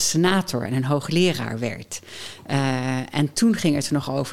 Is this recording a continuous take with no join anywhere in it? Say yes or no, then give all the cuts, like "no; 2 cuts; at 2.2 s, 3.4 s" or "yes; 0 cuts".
yes; 0 cuts